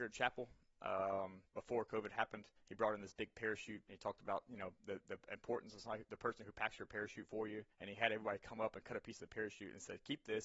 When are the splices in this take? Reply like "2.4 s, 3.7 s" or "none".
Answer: 1.4 s, 2.6 s, 4.8 s, 7.7 s